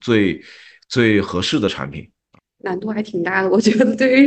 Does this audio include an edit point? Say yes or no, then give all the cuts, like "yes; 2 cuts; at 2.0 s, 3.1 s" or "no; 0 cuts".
no; 0 cuts